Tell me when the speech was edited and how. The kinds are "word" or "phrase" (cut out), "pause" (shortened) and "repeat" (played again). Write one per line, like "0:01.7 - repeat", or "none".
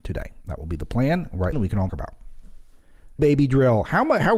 0:01.5 - word
0:01.9 - word
0:03.2 - word